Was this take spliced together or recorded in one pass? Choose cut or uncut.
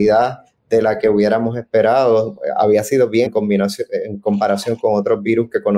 cut